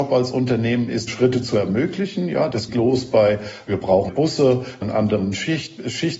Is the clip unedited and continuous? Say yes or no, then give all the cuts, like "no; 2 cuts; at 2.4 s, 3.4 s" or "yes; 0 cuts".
no; 4 cuts; at 1.1 s, 2.7 s, 4.1 s, 4.8 s